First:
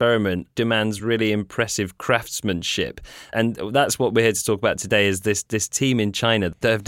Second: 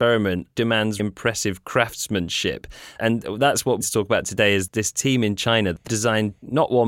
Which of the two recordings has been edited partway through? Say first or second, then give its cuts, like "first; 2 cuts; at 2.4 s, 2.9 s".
second; 4 cuts; at 1.0 s, 3.8 s, 4.7 s, 5.9 s